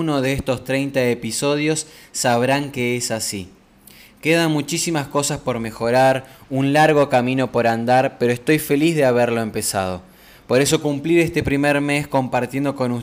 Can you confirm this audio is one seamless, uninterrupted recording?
yes; 0 cuts

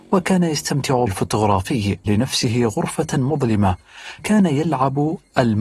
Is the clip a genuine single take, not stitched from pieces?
no; 3 cuts; at 1.1 s, 2.1 s, 4.2 s

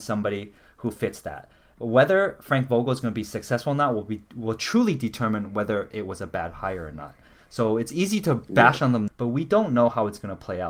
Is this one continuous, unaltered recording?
no; 1 cut; at 9.1 s

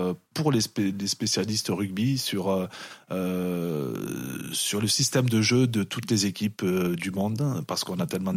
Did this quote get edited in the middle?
no; 0 cuts

